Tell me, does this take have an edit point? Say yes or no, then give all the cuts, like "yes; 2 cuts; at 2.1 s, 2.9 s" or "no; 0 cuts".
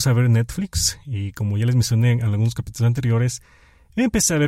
no; 0 cuts